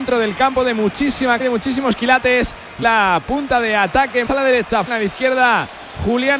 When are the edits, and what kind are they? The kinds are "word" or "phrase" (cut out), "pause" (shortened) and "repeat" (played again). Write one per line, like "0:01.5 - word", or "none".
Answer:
0:01.4 - word
0:02.8 - word
0:04.2 - word
0:04.9 - word